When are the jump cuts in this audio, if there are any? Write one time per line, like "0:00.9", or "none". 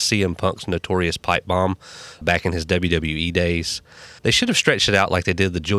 0:02.2
0:04.2